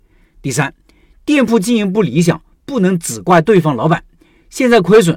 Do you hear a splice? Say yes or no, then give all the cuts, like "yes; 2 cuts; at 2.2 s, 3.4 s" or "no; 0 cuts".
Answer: no; 0 cuts